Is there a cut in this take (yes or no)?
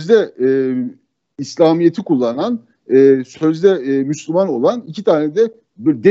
no